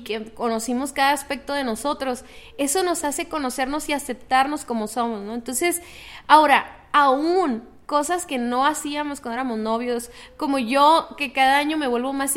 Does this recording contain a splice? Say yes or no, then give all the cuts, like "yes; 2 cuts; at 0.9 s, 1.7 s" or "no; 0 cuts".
no; 0 cuts